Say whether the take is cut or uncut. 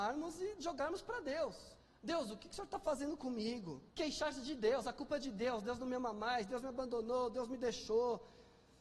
cut